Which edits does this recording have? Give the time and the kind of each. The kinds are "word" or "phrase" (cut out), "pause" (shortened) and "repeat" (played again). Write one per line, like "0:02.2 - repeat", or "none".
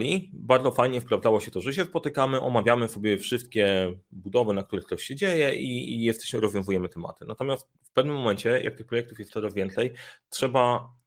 0:07.7 - pause